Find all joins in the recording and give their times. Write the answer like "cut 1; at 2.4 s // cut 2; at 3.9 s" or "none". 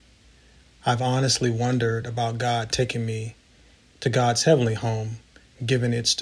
none